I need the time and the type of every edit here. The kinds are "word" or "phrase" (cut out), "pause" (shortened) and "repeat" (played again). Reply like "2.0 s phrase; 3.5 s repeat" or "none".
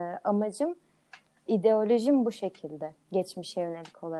1.5 s word